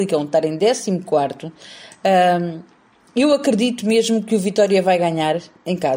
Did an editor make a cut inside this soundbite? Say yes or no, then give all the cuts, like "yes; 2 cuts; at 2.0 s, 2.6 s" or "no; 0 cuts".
no; 0 cuts